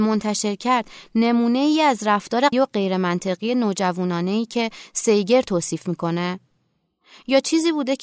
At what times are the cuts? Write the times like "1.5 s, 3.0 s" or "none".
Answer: 2.5 s